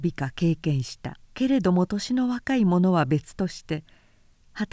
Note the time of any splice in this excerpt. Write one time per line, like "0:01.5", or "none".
0:01.3